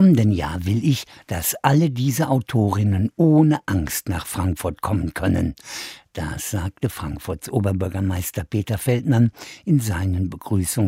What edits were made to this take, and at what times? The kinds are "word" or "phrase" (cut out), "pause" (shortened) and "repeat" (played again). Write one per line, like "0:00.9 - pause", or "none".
none